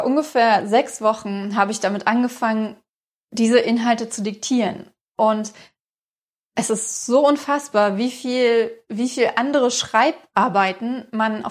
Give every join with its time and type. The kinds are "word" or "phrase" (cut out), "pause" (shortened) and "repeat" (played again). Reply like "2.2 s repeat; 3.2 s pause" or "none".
none